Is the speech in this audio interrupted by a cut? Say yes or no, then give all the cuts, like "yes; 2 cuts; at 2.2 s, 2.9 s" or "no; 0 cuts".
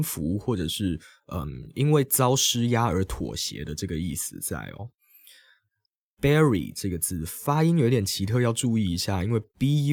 no; 0 cuts